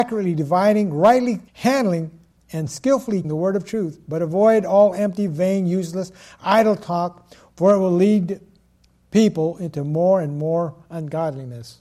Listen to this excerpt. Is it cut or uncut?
cut